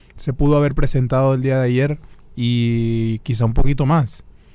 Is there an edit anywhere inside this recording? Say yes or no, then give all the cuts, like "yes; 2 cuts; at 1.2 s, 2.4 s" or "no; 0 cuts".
yes; 1 cut; at 2.1 s